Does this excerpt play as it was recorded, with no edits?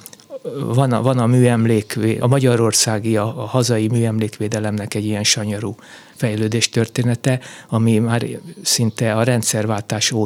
no; 1 cut; at 2.2 s

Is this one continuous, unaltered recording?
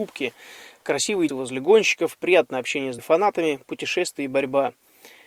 no; 2 cuts; at 1.3 s, 3.0 s

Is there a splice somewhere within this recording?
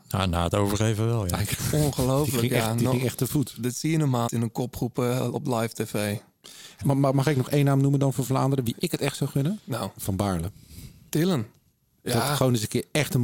yes; 2 cuts; at 4.3 s, 6.8 s

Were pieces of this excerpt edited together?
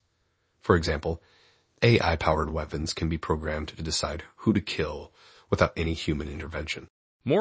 no; 0 cuts

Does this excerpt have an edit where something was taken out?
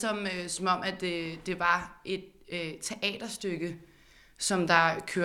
no; 0 cuts

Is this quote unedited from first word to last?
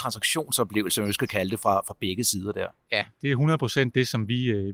yes; 0 cuts

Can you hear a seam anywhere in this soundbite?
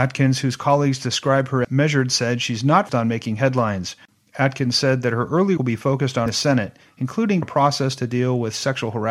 yes; 5 cuts; at 1.6 s, 2.9 s, 5.6 s, 6.3 s, 7.4 s

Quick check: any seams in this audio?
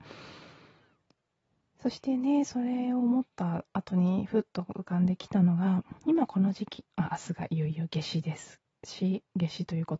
yes; 2 cuts; at 6.0 s, 6.9 s

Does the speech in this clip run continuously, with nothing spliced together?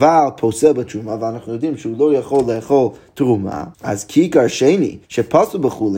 no; 2 cuts; at 3.7 s, 5.0 s

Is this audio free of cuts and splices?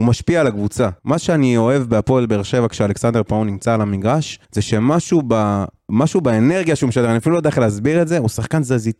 no; 2 cuts; at 1.0 s, 4.4 s

